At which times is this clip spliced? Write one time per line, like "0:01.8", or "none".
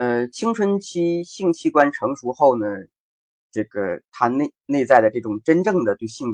none